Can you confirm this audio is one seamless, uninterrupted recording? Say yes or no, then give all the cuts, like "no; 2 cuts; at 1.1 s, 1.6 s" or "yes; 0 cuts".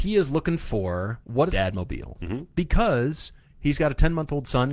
no; 1 cut; at 1.5 s